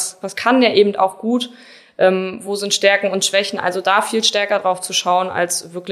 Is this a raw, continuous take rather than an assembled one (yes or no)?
yes